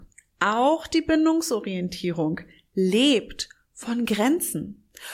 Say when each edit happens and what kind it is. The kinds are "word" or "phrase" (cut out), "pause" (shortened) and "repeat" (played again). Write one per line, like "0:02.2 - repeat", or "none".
none